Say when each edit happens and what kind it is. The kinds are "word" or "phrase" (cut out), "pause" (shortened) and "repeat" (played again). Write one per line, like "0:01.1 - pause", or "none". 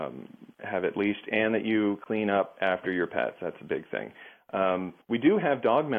0:05.0 - pause